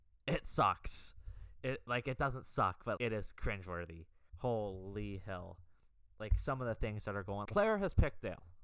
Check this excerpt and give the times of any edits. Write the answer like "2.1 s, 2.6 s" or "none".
3.0 s, 4.3 s, 7.4 s